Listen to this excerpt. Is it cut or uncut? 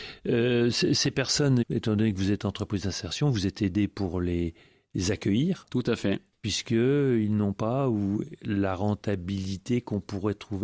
cut